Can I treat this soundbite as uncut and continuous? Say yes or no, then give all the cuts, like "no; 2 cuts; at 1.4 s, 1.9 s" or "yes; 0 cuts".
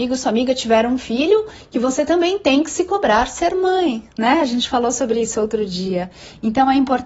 yes; 0 cuts